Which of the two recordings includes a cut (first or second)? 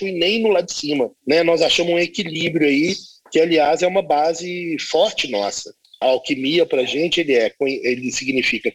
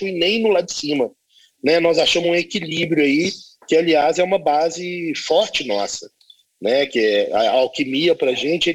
first